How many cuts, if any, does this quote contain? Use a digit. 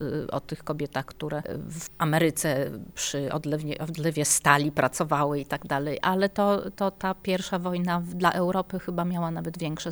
0